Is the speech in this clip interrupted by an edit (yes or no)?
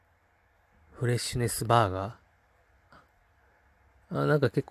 no